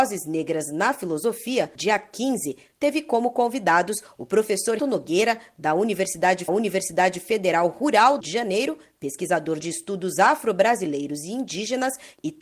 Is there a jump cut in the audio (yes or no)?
yes